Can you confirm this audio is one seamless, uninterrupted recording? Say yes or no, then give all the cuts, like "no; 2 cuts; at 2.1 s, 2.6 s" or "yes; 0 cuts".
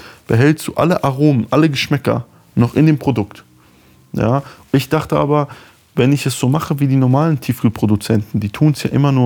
no; 1 cut; at 4.7 s